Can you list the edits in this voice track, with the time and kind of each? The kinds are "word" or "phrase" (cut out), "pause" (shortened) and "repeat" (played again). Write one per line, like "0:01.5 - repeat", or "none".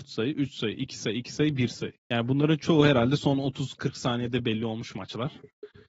0:02.0 - pause